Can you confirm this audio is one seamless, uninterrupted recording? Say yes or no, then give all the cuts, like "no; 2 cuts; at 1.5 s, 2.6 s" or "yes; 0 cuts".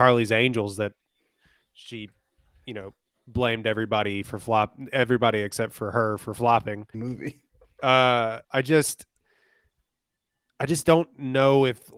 no; 2 cuts; at 6.9 s, 8.4 s